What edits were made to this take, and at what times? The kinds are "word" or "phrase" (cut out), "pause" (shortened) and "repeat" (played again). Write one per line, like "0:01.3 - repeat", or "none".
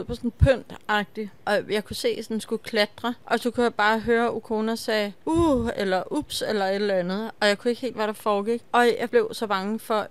0:07.9 - word